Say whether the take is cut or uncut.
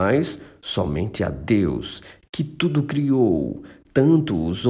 uncut